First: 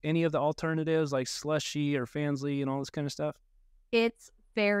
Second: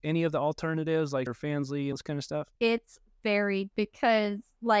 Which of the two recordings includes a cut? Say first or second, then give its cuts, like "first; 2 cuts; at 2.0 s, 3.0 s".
second; 4 cuts; at 1.3 s, 1.9 s, 2.5 s, 3.7 s